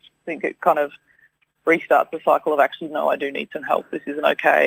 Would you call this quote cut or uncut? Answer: uncut